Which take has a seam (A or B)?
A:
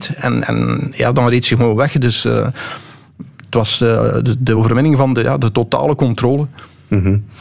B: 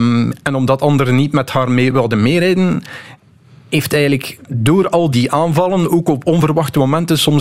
B